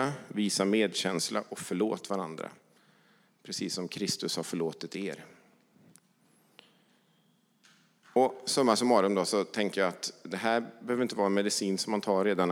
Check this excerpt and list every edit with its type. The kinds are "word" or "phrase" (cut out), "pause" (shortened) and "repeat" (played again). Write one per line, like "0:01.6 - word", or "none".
none